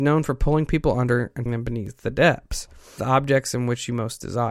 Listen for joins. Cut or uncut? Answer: cut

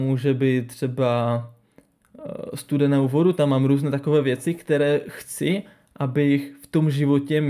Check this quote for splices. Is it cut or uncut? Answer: uncut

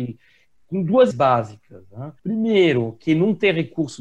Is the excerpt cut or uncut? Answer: cut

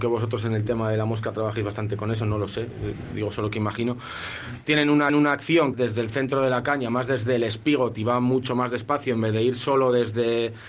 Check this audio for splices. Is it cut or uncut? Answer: cut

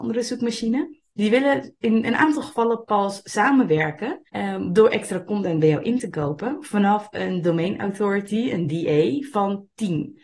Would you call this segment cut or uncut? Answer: cut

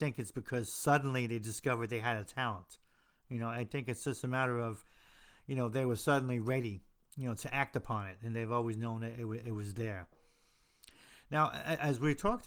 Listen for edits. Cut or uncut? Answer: uncut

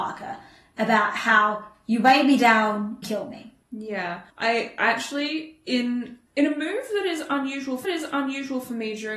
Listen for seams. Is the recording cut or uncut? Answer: cut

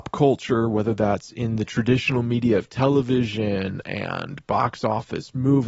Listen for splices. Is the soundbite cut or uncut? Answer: uncut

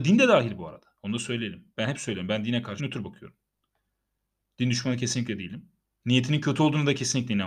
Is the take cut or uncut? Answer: cut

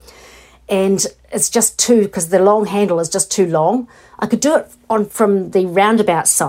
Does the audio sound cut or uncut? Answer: uncut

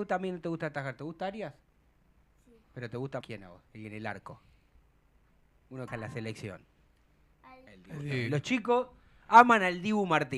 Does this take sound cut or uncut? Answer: cut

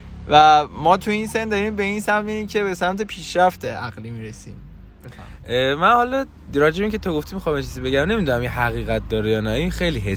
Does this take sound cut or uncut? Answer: uncut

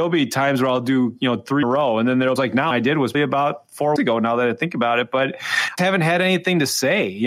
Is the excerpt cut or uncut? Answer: cut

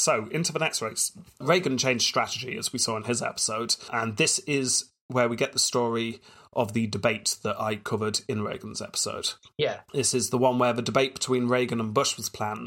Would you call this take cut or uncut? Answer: uncut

